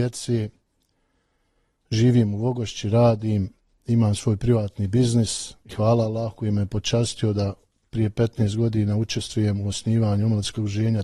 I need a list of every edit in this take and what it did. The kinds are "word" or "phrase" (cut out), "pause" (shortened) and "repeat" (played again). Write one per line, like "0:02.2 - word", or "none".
none